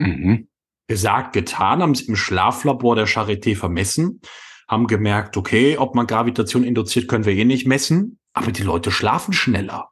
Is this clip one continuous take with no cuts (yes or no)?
no